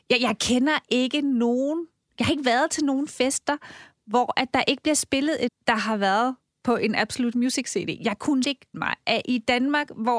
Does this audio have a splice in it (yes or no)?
yes